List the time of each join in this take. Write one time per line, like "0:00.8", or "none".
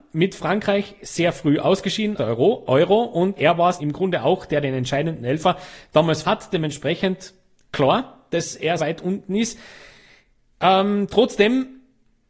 0:02.2
0:03.4
0:03.8
0:06.2
0:08.8